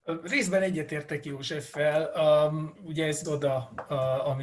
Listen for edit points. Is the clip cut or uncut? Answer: cut